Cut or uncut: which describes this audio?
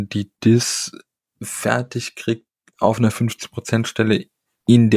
uncut